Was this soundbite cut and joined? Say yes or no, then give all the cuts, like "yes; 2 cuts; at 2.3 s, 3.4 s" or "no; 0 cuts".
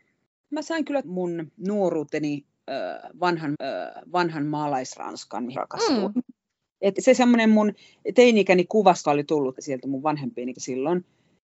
yes; 8 cuts; at 1.0 s, 1.6 s, 3.5 s, 5.6 s, 7.0 s, 9.0 s, 9.6 s, 10.5 s